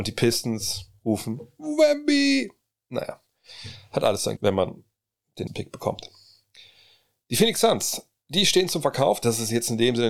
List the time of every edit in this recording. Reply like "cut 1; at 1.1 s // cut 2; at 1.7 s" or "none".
cut 1; at 4.4 s // cut 2; at 5.5 s